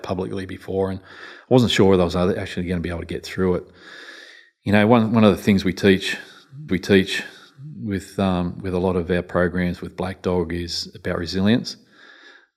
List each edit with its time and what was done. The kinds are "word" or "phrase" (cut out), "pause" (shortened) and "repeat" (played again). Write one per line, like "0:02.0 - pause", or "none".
0:06.7 - repeat